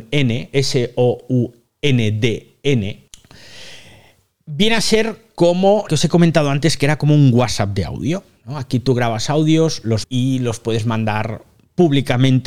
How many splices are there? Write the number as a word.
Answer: three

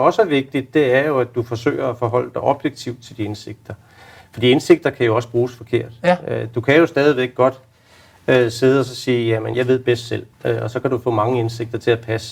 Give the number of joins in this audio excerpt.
two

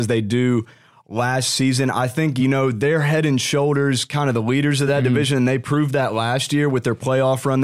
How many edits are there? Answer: zero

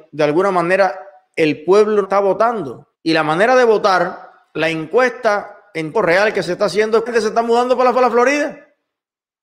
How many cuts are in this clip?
five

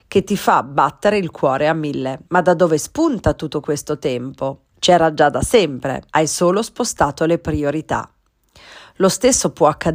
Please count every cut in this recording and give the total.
three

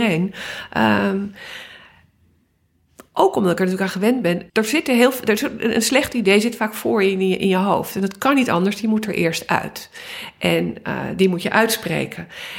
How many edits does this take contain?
one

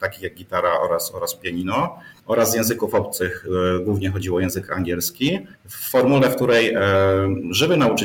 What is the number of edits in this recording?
two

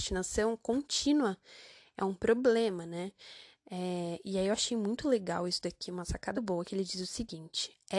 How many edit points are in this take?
one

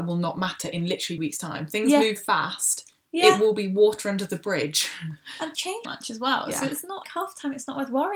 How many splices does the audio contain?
five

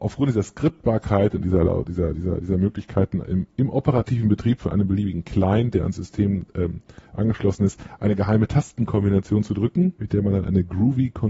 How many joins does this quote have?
zero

